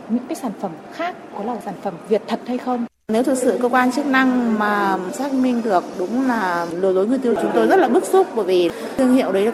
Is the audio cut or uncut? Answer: cut